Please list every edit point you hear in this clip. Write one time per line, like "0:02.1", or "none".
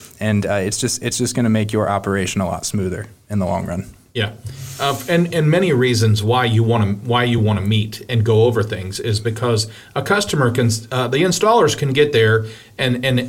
none